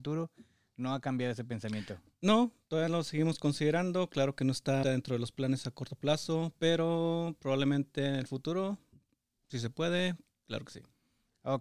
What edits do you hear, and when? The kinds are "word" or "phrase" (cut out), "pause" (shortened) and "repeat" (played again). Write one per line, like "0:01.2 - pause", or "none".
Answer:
0:04.8 - word